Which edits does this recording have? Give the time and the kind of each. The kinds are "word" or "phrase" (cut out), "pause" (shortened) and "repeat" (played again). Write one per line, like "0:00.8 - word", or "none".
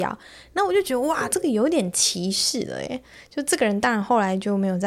none